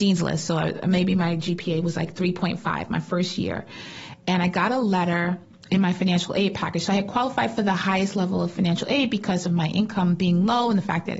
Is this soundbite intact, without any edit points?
yes; 0 cuts

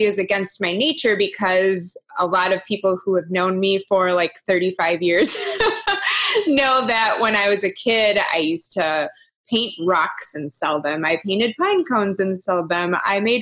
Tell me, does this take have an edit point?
no; 0 cuts

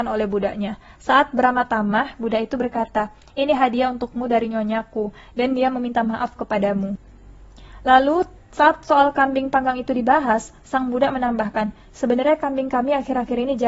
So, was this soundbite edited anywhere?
no; 0 cuts

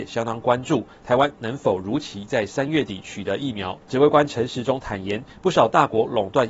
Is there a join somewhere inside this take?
yes; 1 cut; at 3.8 s

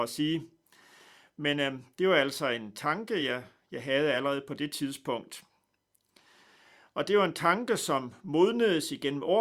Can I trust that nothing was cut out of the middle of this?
yes; 0 cuts

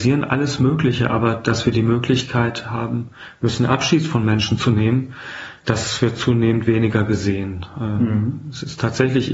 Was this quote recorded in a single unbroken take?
yes; 0 cuts

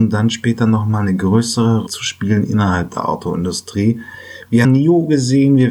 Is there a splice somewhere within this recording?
yes; 2 cuts; at 1.9 s, 4.6 s

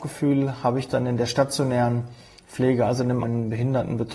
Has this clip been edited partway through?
yes; 1 cut; at 3.2 s

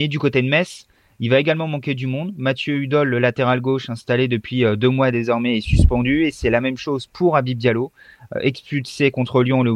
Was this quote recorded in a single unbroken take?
yes; 0 cuts

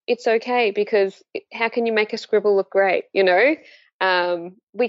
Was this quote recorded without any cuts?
yes; 0 cuts

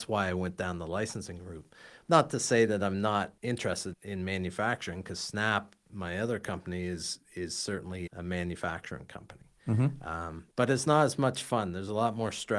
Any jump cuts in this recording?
yes; 2 cuts; at 3.9 s, 8.1 s

